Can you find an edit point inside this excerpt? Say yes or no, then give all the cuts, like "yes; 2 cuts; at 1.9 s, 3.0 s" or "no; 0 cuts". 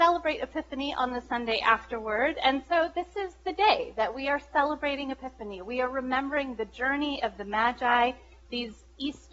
no; 0 cuts